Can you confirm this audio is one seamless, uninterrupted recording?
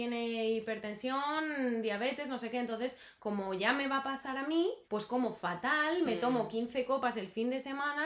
no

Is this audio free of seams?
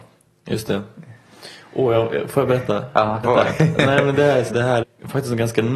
no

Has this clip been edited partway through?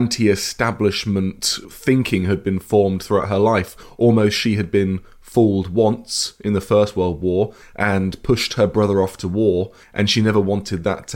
no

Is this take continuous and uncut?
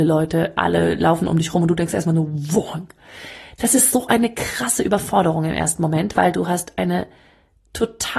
yes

